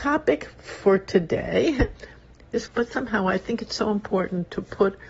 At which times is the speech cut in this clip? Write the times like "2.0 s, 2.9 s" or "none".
2.7 s